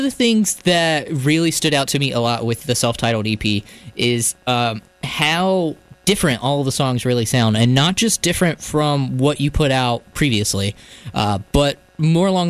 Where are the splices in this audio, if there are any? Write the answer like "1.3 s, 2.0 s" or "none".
none